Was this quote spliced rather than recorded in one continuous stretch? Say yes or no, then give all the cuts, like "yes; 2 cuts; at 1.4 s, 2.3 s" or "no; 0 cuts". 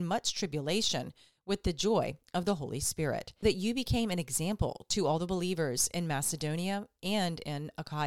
yes; 1 cut; at 3.4 s